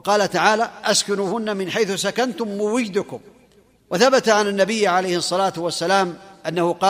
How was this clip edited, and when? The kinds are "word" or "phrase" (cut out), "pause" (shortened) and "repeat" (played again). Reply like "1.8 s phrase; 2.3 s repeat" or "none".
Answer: none